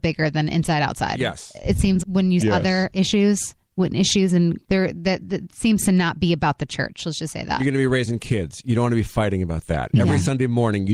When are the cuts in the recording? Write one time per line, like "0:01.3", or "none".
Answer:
0:02.0
0:02.4
0:04.6